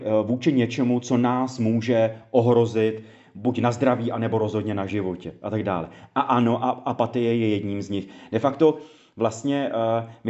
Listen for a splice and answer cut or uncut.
uncut